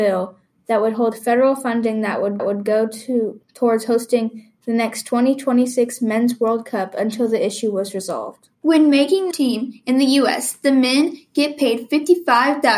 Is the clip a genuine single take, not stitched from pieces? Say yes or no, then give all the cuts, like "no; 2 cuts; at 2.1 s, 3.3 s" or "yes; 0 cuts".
no; 4 cuts; at 2.4 s, 3.4 s, 8.5 s, 9.3 s